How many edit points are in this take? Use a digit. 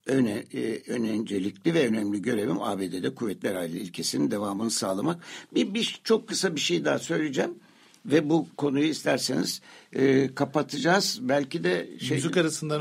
0